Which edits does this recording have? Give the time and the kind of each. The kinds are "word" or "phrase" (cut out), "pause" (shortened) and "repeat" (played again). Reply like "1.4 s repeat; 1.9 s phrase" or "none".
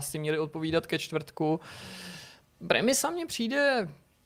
none